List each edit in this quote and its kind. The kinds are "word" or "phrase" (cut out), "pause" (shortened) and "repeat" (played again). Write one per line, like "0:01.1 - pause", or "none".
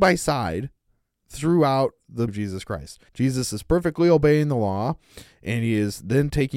0:02.3 - word
0:03.1 - pause